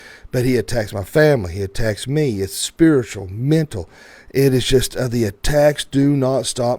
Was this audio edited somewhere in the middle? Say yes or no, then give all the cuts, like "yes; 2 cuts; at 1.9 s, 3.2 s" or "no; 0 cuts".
no; 0 cuts